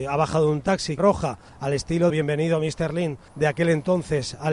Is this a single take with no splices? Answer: no; 4 cuts; at 1.0 s, 1.5 s, 2.1 s, 3.3 s

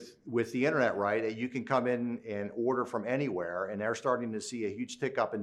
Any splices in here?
no; 0 cuts

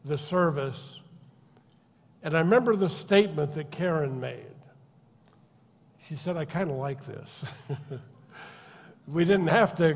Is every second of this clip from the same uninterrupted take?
yes; 0 cuts

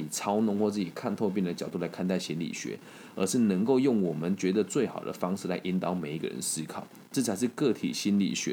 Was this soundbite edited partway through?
no; 0 cuts

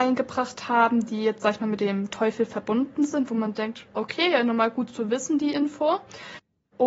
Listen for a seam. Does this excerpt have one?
yes; 1 cut; at 4.0 s

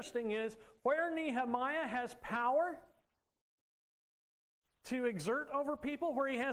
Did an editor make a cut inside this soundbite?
no; 0 cuts

